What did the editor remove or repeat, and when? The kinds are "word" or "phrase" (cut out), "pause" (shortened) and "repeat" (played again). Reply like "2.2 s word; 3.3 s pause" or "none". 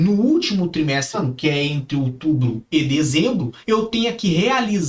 1.1 s word; 3.6 s pause

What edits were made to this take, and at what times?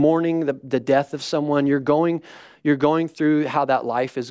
none

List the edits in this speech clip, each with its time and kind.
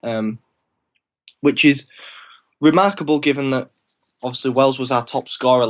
none

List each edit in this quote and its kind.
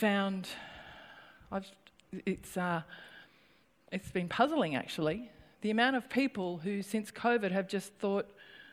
none

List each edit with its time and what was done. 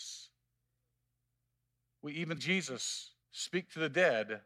2.4 s word; 3.2 s pause

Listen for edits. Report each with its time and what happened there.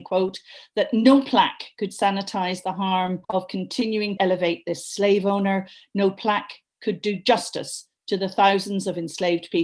3.2 s pause; 4.2 s word

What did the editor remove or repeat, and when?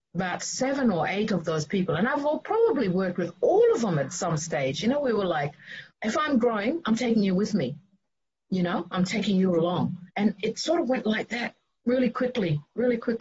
5.9 s pause; 10.1 s pause

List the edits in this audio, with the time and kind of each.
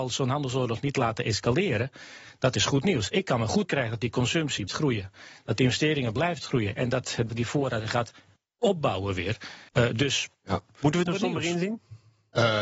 3.6 s phrase; 4.7 s word; 7.3 s word; 8.4 s pause; 9.7 s pause; 10.3 s pause; 11.1 s phrase

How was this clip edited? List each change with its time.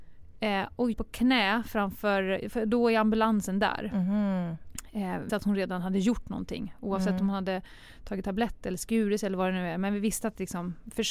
0.9 s phrase; 5.3 s word

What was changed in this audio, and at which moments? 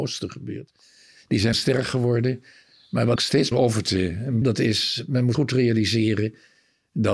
1.5 s word; 3.2 s word; 3.5 s word; 4.4 s word; 5.3 s word

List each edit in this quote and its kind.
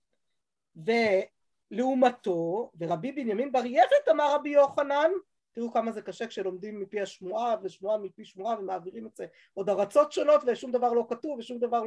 none

